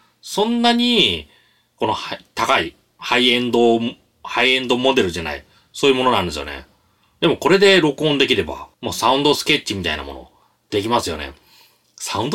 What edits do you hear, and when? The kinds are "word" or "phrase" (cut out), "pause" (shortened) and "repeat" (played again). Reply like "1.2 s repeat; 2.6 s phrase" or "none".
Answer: 8.7 s pause